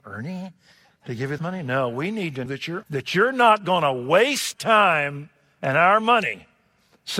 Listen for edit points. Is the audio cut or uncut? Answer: cut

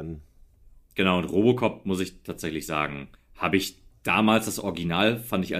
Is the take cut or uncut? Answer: cut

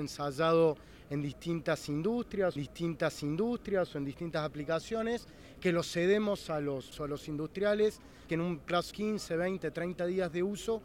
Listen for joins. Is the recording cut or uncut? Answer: cut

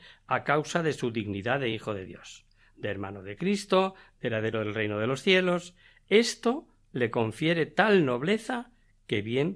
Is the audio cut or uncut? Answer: uncut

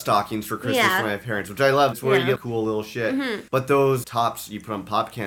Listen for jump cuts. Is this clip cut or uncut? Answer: cut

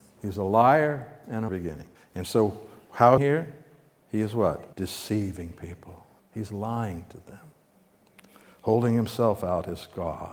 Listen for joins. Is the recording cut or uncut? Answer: cut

